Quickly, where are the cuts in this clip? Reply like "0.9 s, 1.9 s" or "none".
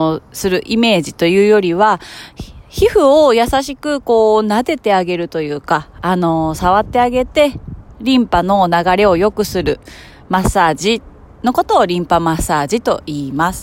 none